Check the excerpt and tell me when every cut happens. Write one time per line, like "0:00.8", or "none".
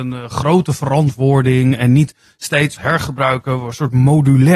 0:02.8